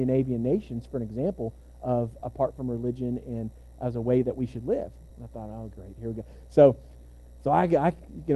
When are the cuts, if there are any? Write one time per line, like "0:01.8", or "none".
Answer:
0:02.2
0:05.1